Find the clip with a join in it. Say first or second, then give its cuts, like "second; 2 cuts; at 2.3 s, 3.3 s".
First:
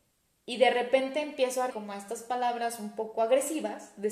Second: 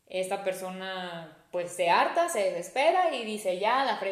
first; 1 cut; at 1.7 s